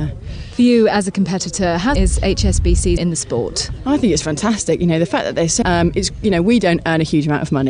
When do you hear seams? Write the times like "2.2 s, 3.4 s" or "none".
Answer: 1.9 s, 3.0 s, 5.6 s

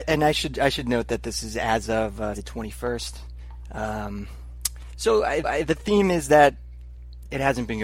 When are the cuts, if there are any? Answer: 2.3 s, 5.4 s

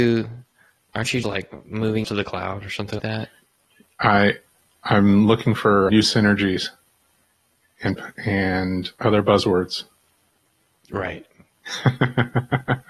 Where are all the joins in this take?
1.2 s, 2.0 s, 3.0 s, 5.9 s, 8.0 s

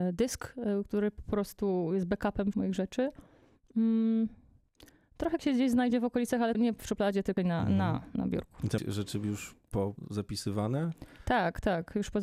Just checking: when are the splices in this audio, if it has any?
2.5 s, 5.4 s, 6.5 s, 7.4 s, 8.1 s, 8.8 s

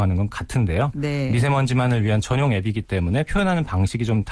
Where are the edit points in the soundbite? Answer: none

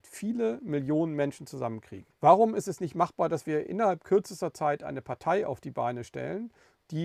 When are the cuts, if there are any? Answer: 2.1 s

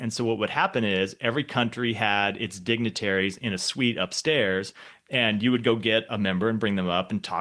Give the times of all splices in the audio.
none

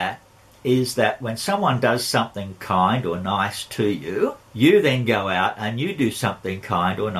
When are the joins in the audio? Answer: 4.5 s

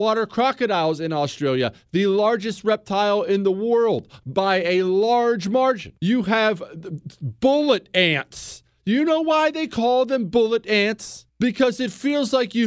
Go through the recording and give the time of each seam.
6.0 s, 11.3 s

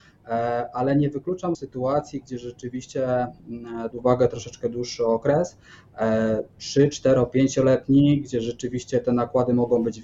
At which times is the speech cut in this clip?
1.5 s, 3.9 s

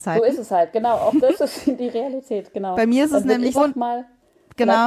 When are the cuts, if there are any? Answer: 3.5 s

